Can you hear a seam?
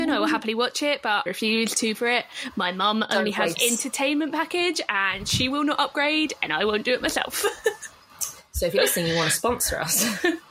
yes; 3 cuts; at 1.3 s, 1.9 s, 3.5 s

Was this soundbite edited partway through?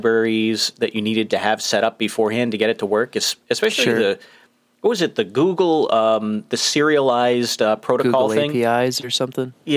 no; 0 cuts

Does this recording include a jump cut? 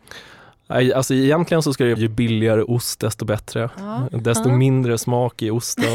yes; 1 cut; at 2.0 s

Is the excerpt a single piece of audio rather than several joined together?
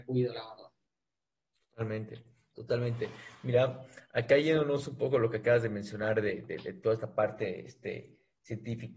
yes; 0 cuts

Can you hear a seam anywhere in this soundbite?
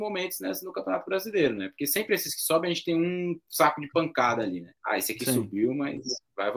yes; 1 cut; at 4.8 s

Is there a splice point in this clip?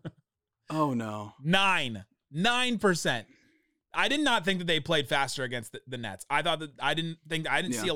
no; 0 cuts

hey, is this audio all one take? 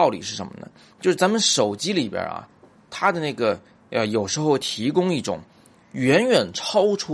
yes; 0 cuts

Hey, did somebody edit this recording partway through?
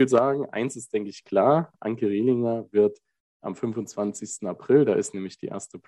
no; 0 cuts

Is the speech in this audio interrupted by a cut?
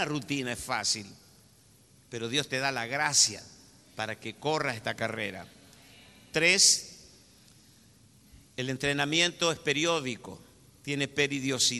no; 0 cuts

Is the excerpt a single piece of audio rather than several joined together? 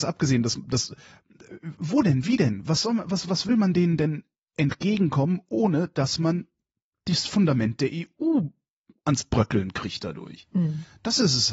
yes; 0 cuts

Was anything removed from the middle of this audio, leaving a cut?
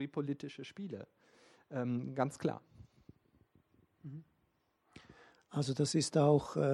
no; 0 cuts

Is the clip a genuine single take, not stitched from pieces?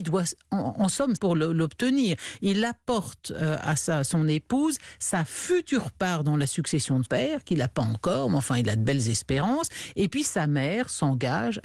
no; 2 cuts; at 1.2 s, 7.0 s

